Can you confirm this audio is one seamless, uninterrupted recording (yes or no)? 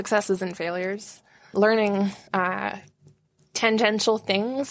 no